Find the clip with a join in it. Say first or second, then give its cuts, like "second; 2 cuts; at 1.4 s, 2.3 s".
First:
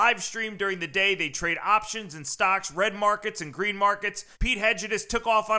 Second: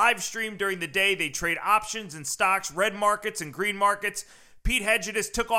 first; 1 cut; at 4.3 s